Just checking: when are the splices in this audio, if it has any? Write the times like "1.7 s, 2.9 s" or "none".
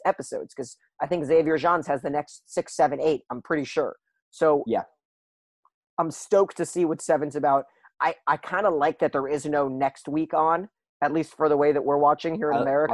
none